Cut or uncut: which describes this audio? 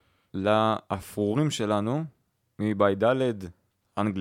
uncut